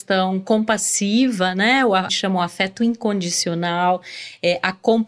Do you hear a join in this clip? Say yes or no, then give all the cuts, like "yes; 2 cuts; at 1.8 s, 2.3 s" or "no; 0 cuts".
yes; 1 cut; at 2.1 s